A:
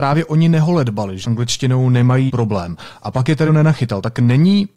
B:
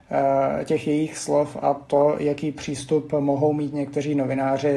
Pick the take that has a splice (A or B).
A